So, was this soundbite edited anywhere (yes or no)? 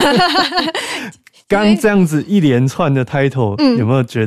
no